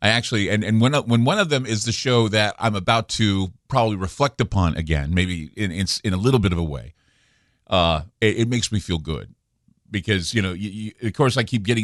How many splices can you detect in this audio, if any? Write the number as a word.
one